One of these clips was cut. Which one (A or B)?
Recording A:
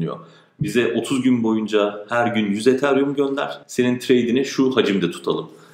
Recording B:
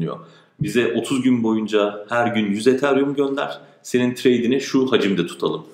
A